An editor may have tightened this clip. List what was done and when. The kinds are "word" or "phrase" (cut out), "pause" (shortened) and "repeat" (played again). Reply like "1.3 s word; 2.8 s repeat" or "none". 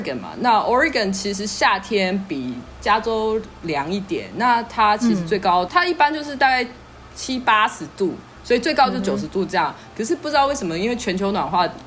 5.7 s word